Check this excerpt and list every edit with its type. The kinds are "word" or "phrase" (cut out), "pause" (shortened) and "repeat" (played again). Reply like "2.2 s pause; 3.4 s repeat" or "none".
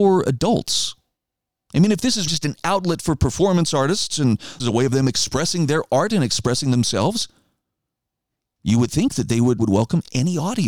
2.3 s word; 4.6 s word; 9.6 s word